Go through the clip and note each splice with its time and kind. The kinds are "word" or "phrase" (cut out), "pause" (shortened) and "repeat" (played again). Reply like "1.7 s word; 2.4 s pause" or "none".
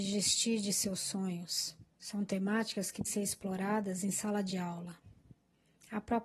1.9 s pause; 3.0 s word